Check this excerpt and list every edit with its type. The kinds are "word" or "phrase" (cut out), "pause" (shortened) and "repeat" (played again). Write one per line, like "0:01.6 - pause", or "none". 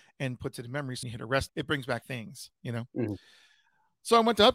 0:01.0 - word
0:01.5 - word
0:02.0 - word